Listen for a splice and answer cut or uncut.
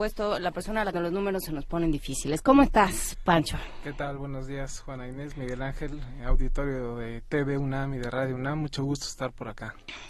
cut